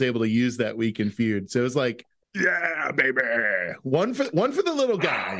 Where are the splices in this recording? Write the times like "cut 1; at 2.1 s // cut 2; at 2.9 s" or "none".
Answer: cut 1; at 2.2 s